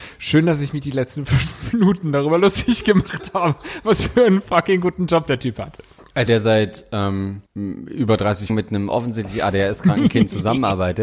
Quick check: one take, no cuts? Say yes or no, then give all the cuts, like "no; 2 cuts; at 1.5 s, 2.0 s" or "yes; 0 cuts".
no; 3 cuts; at 6.3 s, 7.5 s, 8.5 s